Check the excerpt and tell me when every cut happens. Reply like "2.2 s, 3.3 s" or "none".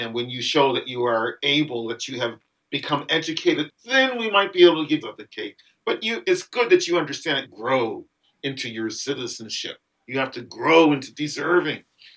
3.7 s, 5.0 s, 7.4 s